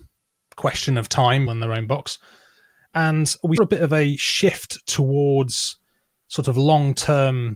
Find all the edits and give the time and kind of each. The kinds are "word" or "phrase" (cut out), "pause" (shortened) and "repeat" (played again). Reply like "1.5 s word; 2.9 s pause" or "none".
1.5 s phrase; 3.6 s word